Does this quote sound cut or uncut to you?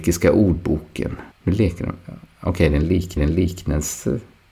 cut